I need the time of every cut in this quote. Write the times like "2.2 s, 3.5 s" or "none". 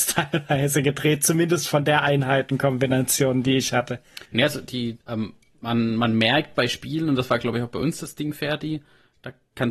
4.3 s, 5.0 s